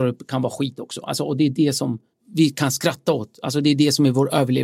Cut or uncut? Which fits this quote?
cut